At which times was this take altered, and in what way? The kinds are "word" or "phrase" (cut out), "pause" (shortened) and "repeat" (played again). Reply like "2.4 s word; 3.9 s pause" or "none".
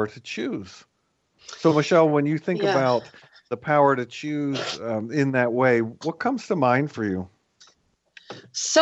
none